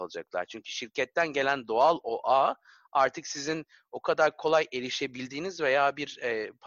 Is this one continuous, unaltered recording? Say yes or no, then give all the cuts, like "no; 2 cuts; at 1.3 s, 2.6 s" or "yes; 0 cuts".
yes; 0 cuts